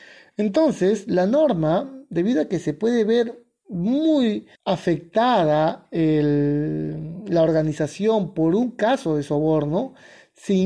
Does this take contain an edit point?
yes; 1 cut; at 4.5 s

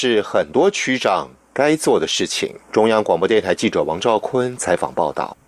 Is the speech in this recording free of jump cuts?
no; 1 cut; at 2.6 s

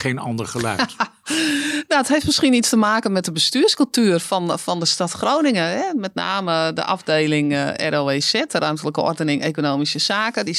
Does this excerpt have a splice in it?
no; 0 cuts

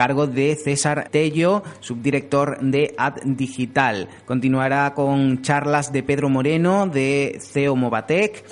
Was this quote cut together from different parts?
yes; 1 cut; at 1.1 s

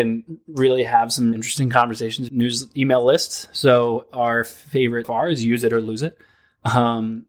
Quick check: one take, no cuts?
no; 3 cuts; at 1.3 s, 2.3 s, 5.0 s

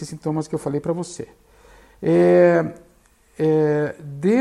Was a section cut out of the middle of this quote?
no; 0 cuts

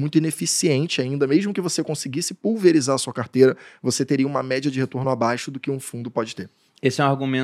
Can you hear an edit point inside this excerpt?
no; 0 cuts

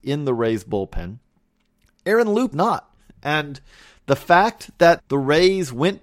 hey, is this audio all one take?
no; 2 cuts; at 2.5 s, 5.0 s

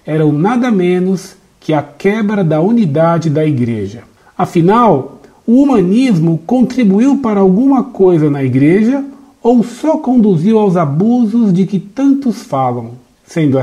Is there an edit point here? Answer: no; 0 cuts

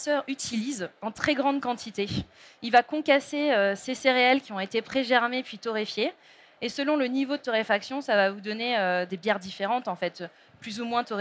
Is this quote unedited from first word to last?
no; 1 cut; at 9.1 s

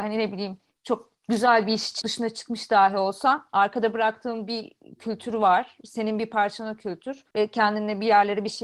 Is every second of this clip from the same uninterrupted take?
no; 2 cuts; at 2.0 s, 7.3 s

